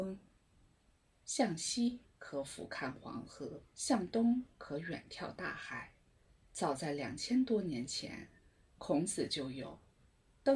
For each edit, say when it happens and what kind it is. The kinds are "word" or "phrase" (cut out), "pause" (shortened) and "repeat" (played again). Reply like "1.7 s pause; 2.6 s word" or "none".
3.7 s pause; 6.3 s pause; 8.4 s pause